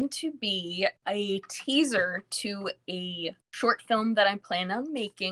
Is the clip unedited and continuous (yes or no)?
no